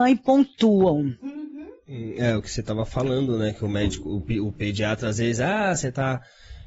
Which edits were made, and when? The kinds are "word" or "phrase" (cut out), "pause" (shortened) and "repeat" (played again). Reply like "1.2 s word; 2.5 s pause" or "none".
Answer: none